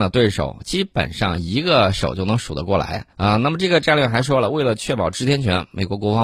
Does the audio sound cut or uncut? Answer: cut